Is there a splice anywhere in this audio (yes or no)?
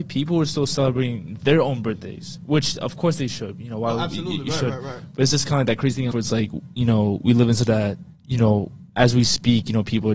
yes